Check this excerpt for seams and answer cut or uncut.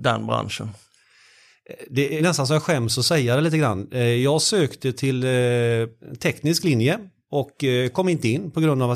cut